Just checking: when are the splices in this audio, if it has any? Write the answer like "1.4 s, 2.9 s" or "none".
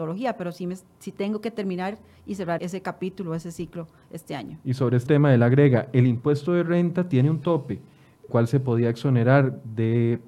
2.6 s, 5.1 s, 8.3 s